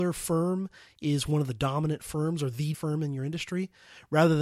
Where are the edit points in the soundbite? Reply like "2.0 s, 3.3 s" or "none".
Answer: 2.7 s